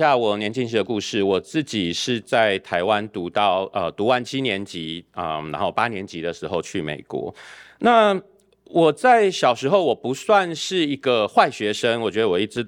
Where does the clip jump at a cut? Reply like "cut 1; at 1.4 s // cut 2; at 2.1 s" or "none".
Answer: none